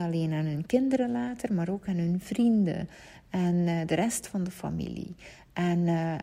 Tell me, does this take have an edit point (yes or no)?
no